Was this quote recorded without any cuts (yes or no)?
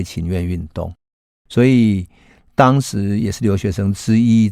yes